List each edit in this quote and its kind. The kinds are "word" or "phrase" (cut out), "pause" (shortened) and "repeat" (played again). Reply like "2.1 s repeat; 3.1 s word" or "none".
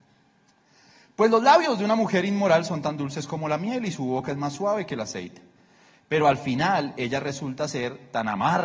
none